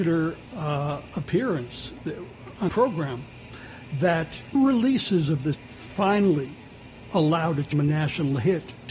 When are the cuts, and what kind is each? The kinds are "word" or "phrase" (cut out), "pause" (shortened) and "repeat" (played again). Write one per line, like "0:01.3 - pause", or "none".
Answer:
0:02.7 - word
0:04.6 - phrase
0:05.5 - word
0:07.7 - word